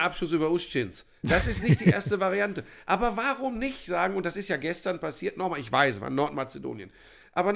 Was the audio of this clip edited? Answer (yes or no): no